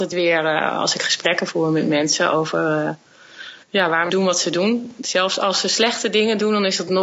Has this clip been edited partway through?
yes; 1 cut; at 4.1 s

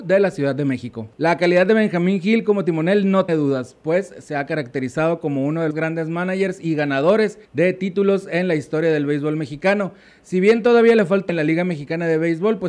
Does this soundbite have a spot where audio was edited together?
yes; 4 cuts; at 3.3 s, 5.7 s, 7.4 s, 11.3 s

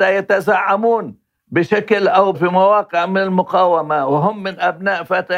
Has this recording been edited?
yes; 1 cut; at 2.3 s

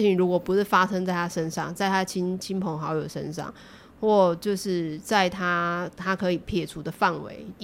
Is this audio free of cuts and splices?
yes; 0 cuts

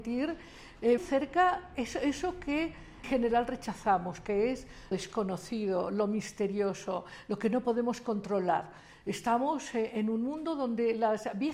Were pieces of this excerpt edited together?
yes; 3 cuts; at 1.0 s, 3.0 s, 4.9 s

